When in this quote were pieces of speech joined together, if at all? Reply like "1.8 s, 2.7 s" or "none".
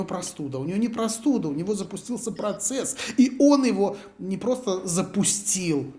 none